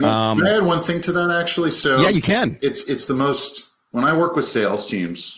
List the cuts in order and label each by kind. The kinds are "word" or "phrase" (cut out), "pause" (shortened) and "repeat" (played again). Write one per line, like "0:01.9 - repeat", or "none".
none

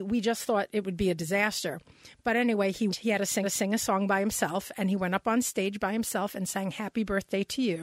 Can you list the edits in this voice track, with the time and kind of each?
0:02.9 - word
0:03.4 - repeat

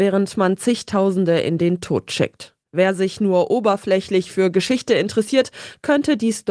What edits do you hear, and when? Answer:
0:02.6 - pause

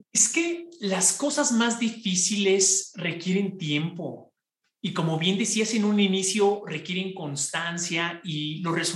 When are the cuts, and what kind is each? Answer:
none

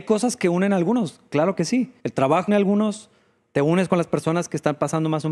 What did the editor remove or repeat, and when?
0:02.0 - pause
0:02.5 - word
0:03.5 - phrase

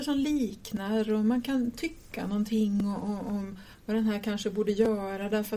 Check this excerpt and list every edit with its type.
none

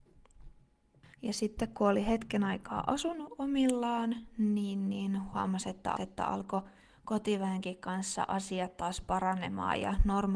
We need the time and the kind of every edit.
0:01.1 - pause
0:06.0 - repeat

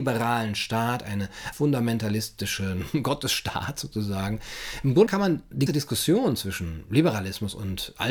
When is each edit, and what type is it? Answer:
0:01.5 - word
0:05.1 - word
0:05.7 - word

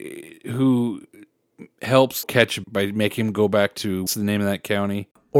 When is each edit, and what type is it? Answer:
0:02.2 - word
0:02.6 - word
0:04.1 - word

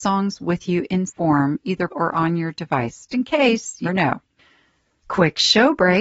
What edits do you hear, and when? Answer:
0:01.1 - word
0:01.9 - word
0:03.1 - word
0:03.8 - word

